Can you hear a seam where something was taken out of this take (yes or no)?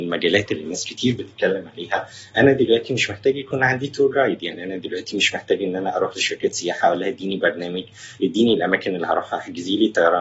no